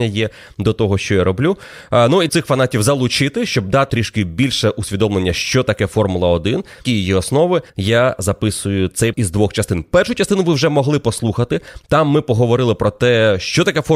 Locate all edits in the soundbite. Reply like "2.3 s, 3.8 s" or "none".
2.3 s, 3.9 s, 6.8 s, 7.7 s, 9.1 s